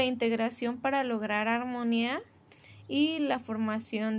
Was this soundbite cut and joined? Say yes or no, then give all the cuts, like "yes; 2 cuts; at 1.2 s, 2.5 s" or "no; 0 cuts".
no; 0 cuts